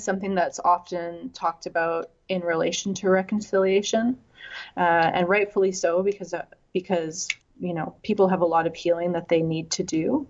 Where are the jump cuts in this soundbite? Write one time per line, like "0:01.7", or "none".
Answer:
0:07.4
0:08.0